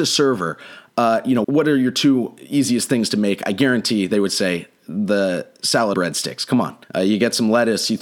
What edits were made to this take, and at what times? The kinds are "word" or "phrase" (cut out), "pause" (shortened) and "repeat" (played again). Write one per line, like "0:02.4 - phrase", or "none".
0:01.4 - word
0:05.9 - word
0:06.8 - pause

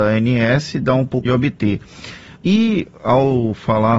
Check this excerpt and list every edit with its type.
0:01.3 - phrase
0:02.4 - pause

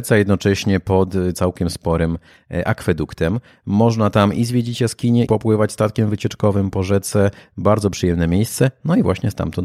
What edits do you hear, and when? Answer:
0:05.3 - word

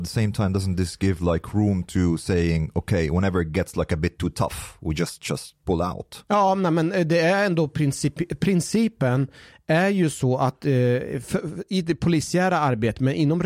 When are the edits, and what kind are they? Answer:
none

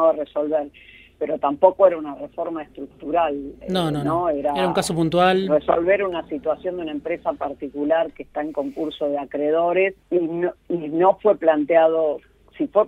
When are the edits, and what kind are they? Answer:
0:10.0 - pause
0:10.6 - pause

